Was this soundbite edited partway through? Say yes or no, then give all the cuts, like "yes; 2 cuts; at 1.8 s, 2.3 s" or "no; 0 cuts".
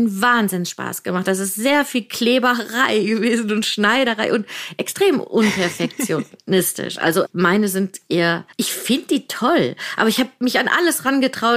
yes; 1 cut; at 8.5 s